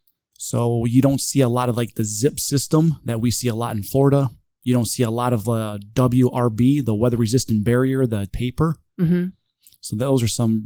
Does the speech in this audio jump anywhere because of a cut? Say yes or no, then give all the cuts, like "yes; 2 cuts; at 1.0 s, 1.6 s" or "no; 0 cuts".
yes; 1 cut; at 8.3 s